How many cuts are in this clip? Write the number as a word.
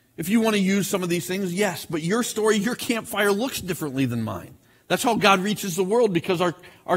zero